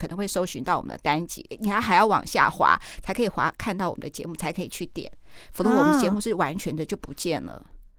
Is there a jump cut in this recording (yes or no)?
no